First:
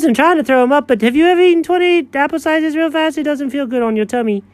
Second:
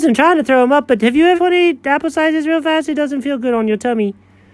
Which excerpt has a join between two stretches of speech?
second; 1 cut; at 1.4 s

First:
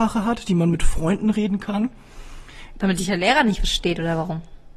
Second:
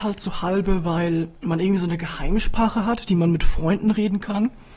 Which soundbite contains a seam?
second; 1 cut; at 1.4 s

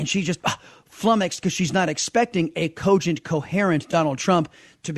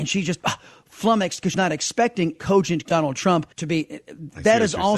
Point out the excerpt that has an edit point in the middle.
second; 4 cuts; at 1.5 s, 2.3 s, 2.8 s, 3.5 s

